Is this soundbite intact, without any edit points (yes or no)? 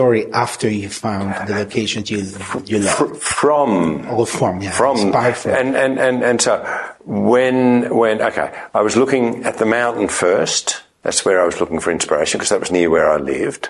yes